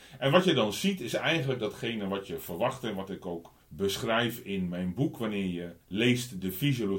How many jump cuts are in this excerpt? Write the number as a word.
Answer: two